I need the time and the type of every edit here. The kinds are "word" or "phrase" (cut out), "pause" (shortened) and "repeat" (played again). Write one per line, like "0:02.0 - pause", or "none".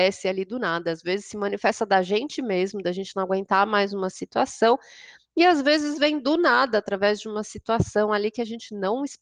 none